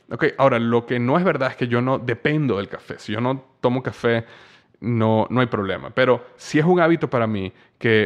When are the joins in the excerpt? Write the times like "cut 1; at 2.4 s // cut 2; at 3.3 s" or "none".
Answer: none

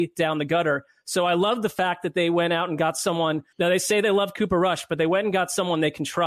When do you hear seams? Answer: cut 1; at 3.5 s

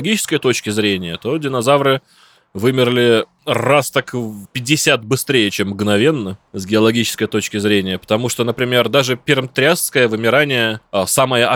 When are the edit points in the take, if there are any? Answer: none

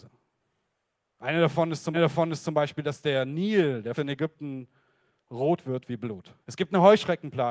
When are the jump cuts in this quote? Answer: cut 1; at 1.9 s // cut 2; at 4.0 s // cut 3; at 6.4 s

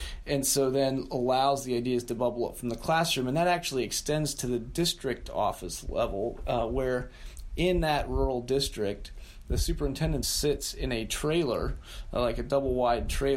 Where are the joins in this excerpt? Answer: cut 1; at 10.2 s

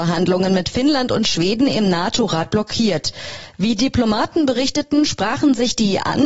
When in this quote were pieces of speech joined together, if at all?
none

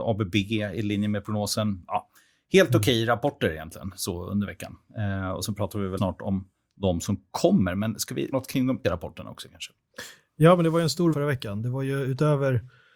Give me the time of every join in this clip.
cut 1; at 6.0 s // cut 2; at 8.3 s // cut 3; at 8.8 s // cut 4; at 11.1 s

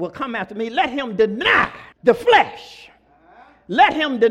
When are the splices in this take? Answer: cut 1; at 1.9 s

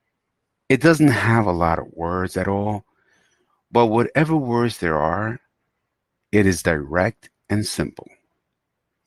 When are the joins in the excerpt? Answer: none

